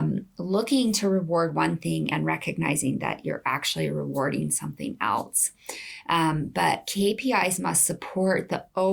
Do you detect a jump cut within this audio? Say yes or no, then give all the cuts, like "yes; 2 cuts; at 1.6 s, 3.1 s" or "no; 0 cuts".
no; 0 cuts